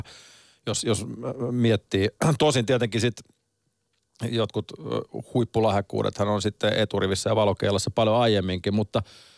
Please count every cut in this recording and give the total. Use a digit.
0